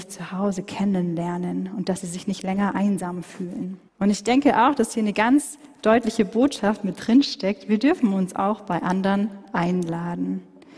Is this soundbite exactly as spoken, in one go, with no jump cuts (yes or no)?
no